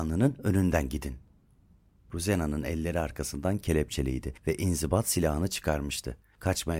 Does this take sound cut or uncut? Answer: uncut